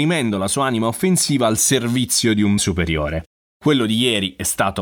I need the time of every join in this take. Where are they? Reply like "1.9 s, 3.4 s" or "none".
2.6 s